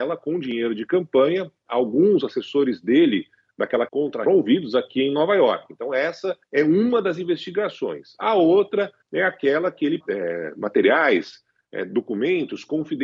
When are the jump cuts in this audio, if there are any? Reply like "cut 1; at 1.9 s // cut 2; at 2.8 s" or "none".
cut 1; at 3.9 s // cut 2; at 4.3 s // cut 3; at 6.4 s // cut 4; at 9.0 s // cut 5; at 10.0 s